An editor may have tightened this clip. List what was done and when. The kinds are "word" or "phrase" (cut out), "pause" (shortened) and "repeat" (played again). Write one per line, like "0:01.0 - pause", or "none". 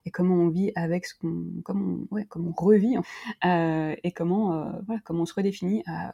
0:03.0 - word